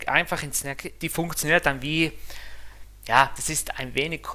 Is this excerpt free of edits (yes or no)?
no